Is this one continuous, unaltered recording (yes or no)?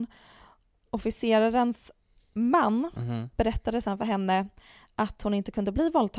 yes